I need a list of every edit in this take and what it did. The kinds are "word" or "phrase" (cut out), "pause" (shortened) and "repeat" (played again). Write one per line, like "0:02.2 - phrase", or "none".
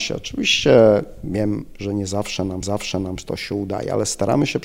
0:02.6 - repeat